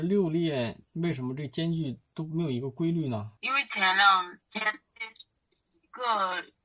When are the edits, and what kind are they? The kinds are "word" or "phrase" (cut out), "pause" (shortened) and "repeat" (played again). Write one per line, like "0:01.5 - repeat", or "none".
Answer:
0:03.4 - pause
0:04.4 - pause

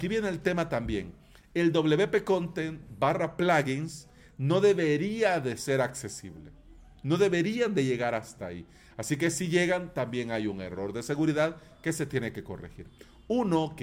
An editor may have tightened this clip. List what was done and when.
none

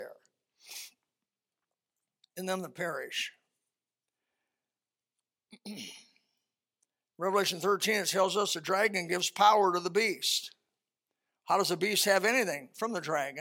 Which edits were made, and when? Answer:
none

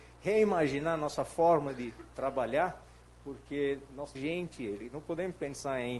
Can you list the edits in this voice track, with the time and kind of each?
0:04.2 - word

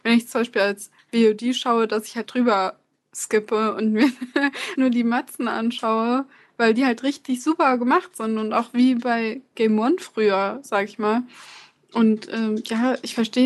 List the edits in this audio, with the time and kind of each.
0:02.2 - word
0:04.8 - word

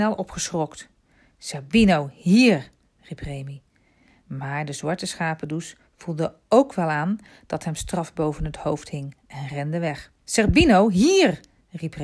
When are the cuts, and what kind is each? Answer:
0:02.8 - pause
0:10.2 - pause

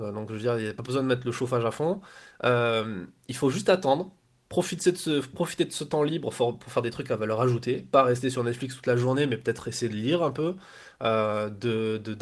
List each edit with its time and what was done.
none

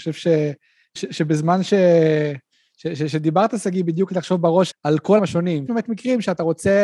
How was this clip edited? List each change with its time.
0:01.0 - word
0:04.1 - word
0:04.7 - word
0:05.2 - word
0:05.7 - word

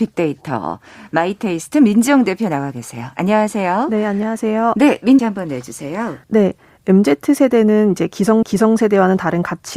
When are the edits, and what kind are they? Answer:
0:05.2 - phrase
0:06.2 - pause
0:08.4 - repeat

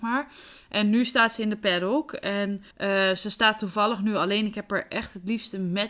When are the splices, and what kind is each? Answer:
0:02.7 - pause

